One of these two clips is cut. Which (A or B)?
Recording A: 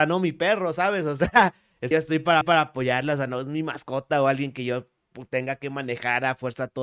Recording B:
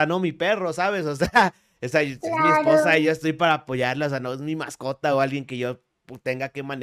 A